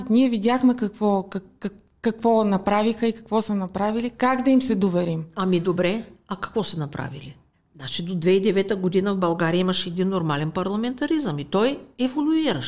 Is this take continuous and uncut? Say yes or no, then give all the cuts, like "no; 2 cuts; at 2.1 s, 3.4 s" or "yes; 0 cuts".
no; 1 cut; at 7.5 s